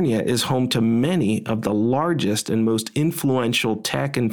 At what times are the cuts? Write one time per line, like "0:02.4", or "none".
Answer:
none